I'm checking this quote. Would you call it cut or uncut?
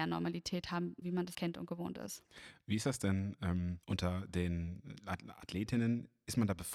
cut